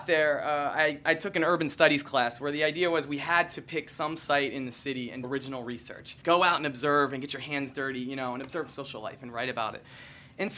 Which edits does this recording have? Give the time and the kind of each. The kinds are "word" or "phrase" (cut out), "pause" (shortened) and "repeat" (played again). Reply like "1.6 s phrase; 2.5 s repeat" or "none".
5.2 s word; 6.2 s pause